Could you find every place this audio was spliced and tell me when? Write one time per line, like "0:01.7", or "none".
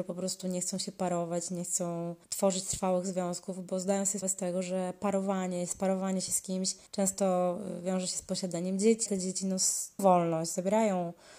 0:02.2
0:04.2
0:06.9
0:09.1
0:10.0